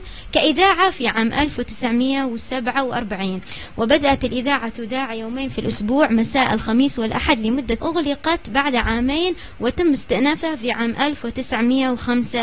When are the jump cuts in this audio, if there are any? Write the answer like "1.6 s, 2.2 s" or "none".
7.8 s